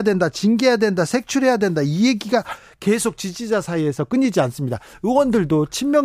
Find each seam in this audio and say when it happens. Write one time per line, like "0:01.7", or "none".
none